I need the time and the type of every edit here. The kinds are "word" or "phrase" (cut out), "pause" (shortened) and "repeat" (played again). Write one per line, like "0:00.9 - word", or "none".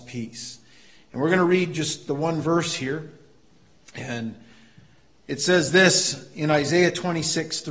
none